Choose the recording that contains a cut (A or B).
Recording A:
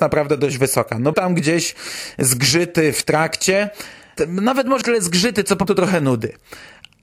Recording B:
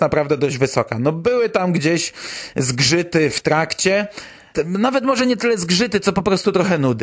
A